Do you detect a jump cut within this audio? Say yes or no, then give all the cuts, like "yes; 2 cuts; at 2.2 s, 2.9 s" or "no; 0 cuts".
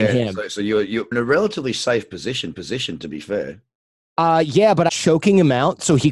yes; 3 cuts; at 1.1 s, 2.5 s, 4.9 s